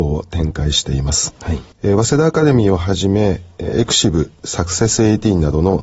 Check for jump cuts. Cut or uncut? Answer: cut